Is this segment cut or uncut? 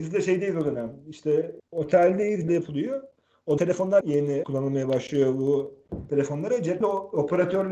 cut